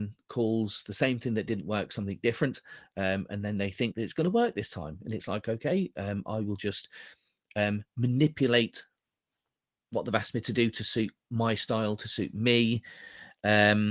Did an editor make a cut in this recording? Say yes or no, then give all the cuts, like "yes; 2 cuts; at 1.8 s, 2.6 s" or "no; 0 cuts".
no; 0 cuts